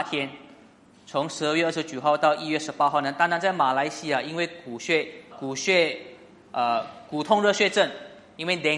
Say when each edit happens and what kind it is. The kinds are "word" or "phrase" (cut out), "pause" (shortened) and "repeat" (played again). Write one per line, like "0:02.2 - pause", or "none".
0:05.3 - word